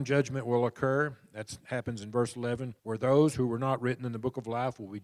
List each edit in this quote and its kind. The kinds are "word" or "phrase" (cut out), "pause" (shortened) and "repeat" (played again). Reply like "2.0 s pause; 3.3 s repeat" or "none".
2.8 s pause

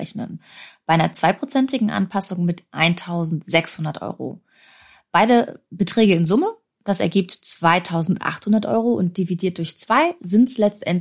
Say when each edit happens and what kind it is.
none

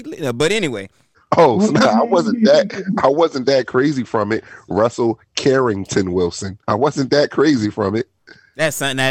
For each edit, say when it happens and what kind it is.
1.1 s pause; 6.6 s pause

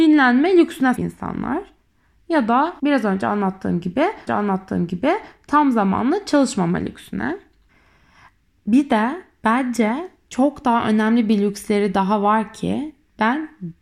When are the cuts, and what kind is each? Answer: 1.0 s word; 2.8 s pause; 4.3 s repeat; 7.7 s pause

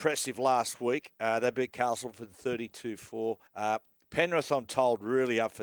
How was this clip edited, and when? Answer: 3.5 s pause

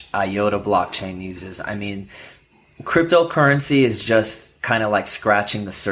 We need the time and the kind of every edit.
none

